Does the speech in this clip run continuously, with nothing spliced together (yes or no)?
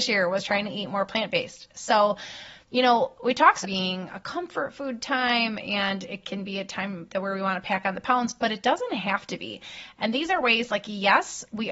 no